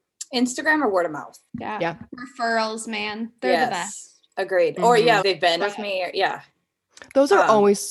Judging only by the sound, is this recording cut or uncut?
cut